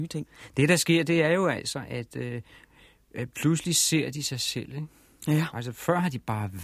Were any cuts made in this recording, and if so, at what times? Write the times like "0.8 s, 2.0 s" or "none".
none